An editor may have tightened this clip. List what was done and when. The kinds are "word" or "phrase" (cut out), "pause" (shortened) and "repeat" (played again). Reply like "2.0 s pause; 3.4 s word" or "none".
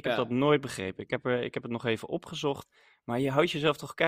none